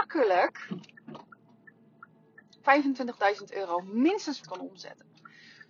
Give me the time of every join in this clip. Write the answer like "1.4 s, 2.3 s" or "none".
4.4 s